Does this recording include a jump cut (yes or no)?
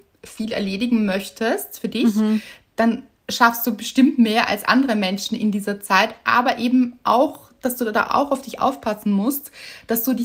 no